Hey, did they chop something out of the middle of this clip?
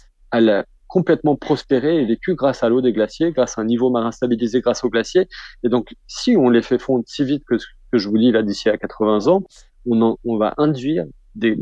no; 0 cuts

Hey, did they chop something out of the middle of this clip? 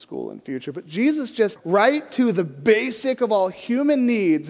yes; 1 cut; at 1.6 s

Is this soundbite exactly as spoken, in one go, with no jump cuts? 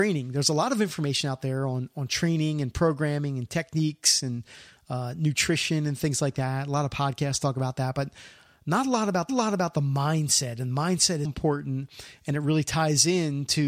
no; 2 cuts; at 9.3 s, 11.2 s

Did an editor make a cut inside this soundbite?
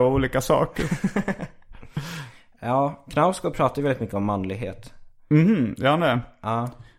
no; 0 cuts

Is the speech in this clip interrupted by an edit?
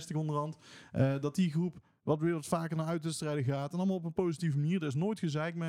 no; 0 cuts

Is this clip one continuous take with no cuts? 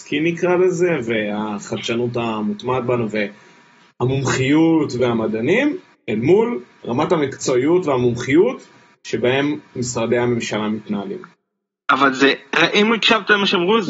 yes; 0 cuts

